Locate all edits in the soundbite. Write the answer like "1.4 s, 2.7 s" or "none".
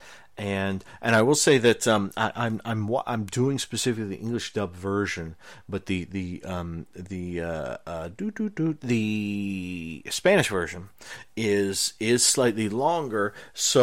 none

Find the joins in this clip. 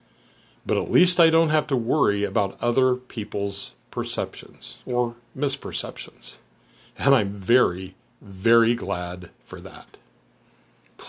none

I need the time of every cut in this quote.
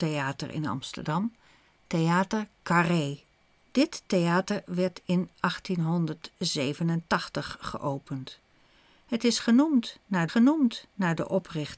3.6 s, 10.3 s

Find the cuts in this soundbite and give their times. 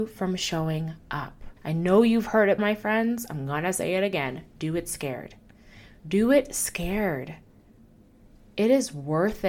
1.6 s, 2.6 s

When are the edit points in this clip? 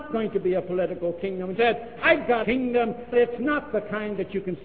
1.6 s, 2.4 s, 3.1 s

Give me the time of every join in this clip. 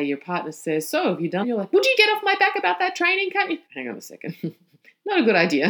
1.4 s, 1.9 s, 3.6 s

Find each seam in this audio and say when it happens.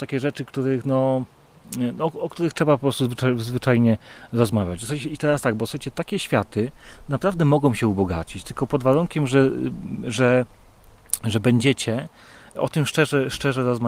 none

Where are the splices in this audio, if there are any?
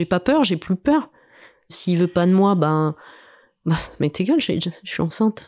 none

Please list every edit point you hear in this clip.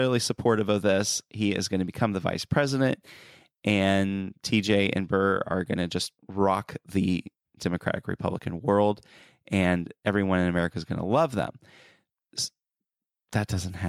6.2 s

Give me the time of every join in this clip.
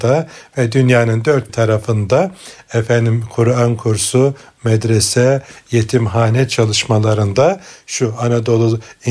1.5 s

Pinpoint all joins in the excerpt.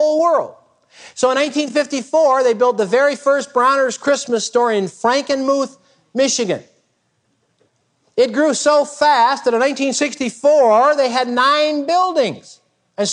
none

